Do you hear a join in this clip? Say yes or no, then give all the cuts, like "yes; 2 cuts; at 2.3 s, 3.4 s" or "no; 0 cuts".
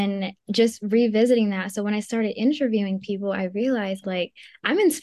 yes; 1 cut; at 4.0 s